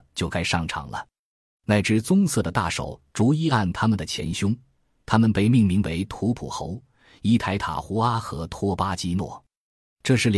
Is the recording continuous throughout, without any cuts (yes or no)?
yes